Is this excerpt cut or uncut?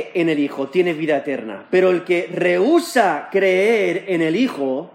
uncut